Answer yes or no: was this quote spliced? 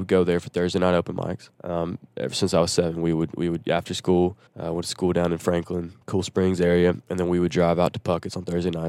yes